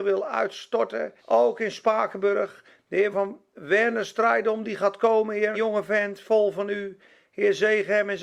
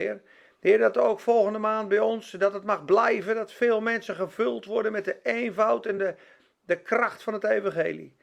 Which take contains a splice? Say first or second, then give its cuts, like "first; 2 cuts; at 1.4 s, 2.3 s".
first; 3 cuts; at 1.2 s, 3.1 s, 5.5 s